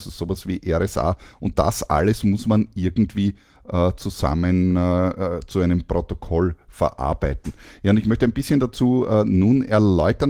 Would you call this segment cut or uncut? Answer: uncut